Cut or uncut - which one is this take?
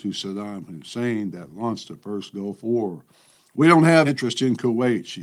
cut